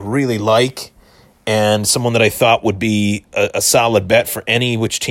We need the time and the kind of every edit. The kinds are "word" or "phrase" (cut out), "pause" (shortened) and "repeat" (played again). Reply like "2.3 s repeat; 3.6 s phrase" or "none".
none

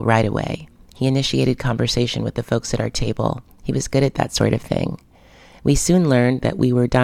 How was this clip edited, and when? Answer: none

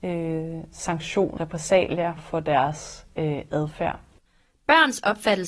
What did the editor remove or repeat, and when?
1.4 s word; 2.2 s word; 3.1 s pause; 4.3 s pause

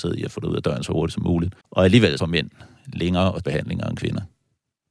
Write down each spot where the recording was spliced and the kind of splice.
1.6 s pause; 2.2 s phrase; 3.4 s word

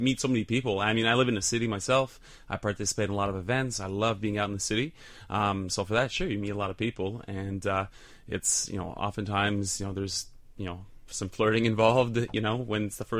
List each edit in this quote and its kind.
none

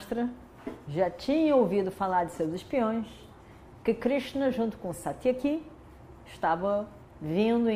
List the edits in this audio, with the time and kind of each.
none

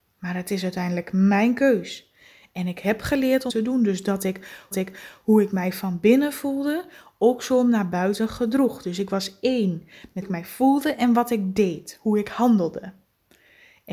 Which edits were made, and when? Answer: 3.5 s phrase; 4.7 s repeat; 10.2 s word

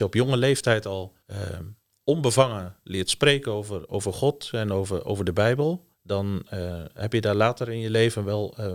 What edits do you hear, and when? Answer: 1.2 s pause; 5.9 s pause

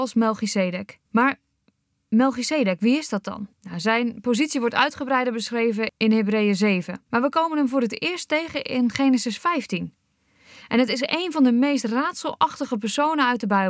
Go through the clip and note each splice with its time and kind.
1.1 s pause; 3.5 s pause; 7.1 s pause

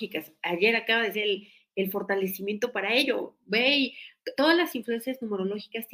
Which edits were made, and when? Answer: 1.1 s word; 4.4 s word

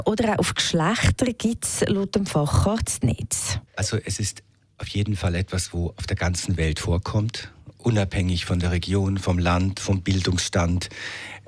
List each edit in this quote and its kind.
3.7 s pause

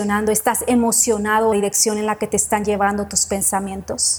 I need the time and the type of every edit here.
1.5 s phrase

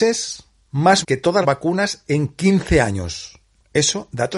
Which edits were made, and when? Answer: 1.0 s word; 1.4 s word

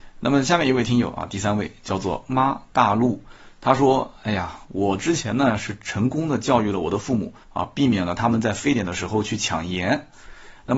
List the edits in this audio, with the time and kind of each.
7.4 s pause

